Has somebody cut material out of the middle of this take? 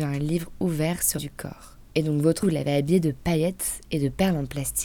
yes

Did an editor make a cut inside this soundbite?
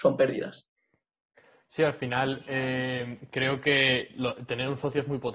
no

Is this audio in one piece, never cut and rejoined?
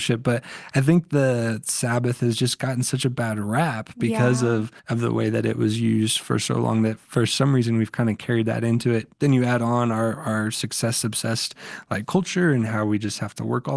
no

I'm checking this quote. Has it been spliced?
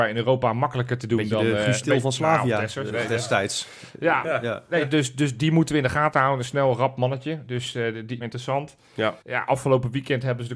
yes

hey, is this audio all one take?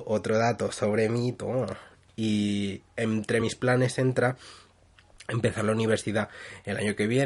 yes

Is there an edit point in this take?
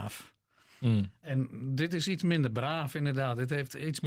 no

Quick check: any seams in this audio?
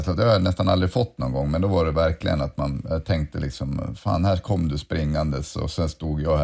no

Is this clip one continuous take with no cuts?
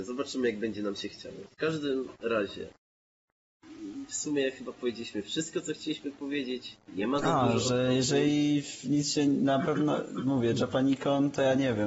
yes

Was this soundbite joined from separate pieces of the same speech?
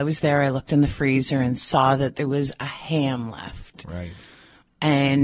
no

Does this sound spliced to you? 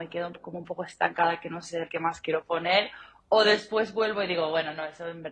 yes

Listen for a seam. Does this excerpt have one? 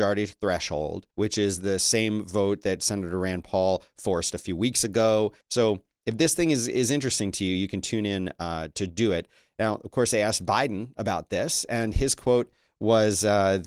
yes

